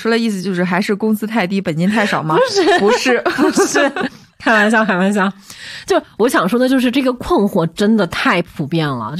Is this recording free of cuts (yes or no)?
yes